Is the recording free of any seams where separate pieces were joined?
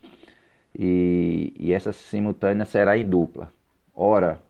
yes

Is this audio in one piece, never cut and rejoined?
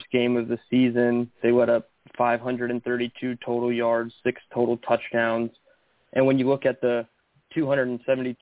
yes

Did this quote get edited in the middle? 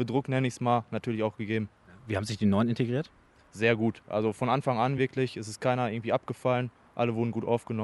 no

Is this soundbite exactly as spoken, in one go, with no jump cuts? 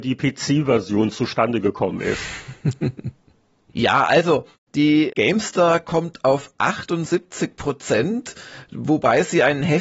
yes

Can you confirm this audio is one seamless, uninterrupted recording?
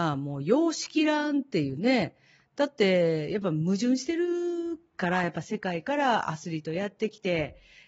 yes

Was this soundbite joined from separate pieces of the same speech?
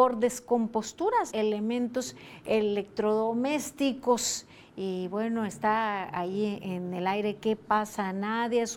yes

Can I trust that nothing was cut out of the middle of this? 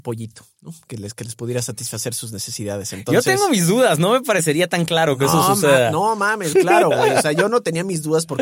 no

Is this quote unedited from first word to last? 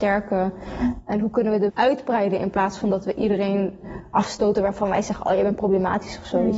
no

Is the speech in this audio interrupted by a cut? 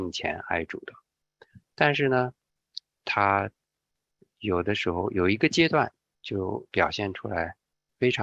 yes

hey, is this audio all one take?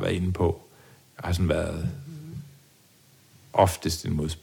yes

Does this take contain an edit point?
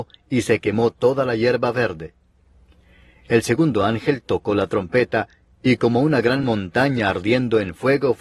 no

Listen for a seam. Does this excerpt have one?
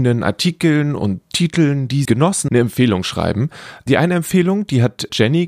yes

